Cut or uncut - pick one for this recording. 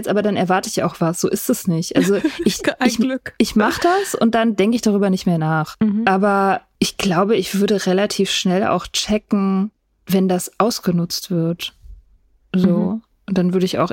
uncut